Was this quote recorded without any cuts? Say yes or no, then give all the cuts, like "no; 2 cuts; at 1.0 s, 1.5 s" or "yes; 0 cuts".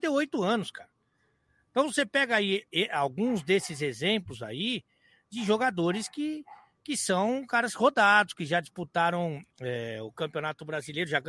no; 1 cut; at 9.5 s